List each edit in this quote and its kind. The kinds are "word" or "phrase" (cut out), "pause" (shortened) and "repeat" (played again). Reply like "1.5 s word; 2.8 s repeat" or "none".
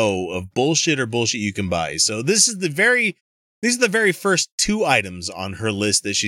none